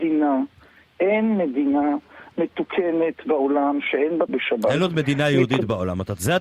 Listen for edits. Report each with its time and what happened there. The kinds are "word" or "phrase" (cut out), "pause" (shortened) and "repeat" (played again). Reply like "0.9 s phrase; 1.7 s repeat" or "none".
4.3 s phrase